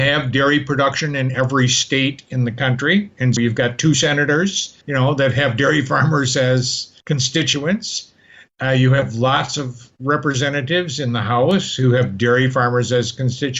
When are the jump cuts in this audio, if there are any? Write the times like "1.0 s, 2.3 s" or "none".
3.4 s, 4.8 s, 7.0 s